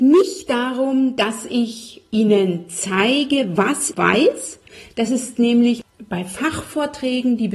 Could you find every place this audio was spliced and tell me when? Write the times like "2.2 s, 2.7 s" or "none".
3.9 s

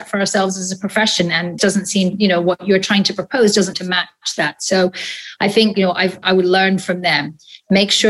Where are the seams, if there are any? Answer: 1.6 s, 3.7 s, 5.7 s, 6.2 s

